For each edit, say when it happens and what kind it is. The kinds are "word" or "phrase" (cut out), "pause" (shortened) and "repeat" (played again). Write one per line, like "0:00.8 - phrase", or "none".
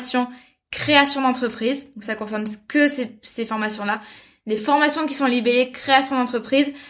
none

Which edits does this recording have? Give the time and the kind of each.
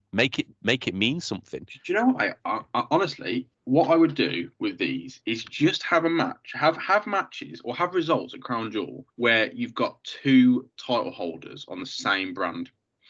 0:03.5 - pause
0:09.1 - pause
0:10.7 - pause

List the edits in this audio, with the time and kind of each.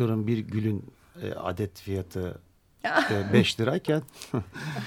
none

